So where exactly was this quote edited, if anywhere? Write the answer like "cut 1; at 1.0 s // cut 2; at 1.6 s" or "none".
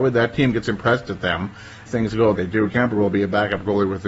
cut 1; at 1.9 s // cut 2; at 2.3 s // cut 3; at 2.7 s